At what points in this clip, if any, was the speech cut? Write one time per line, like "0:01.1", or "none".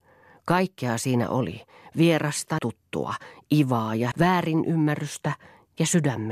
0:02.6
0:04.1